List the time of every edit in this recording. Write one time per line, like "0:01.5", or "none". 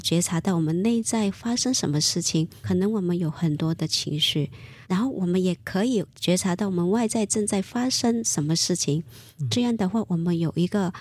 0:02.6
0:04.8